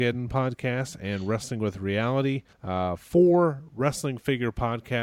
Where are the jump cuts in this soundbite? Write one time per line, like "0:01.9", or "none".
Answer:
0:02.5

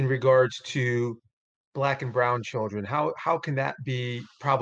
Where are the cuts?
none

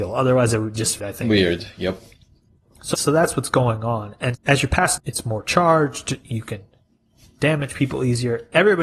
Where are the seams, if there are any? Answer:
0:01.0
0:02.9
0:04.3
0:05.0

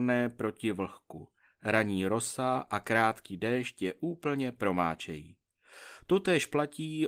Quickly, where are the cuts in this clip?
none

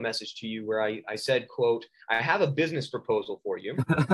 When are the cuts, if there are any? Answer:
none

